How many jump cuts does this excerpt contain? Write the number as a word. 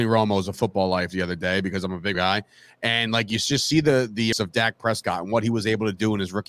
two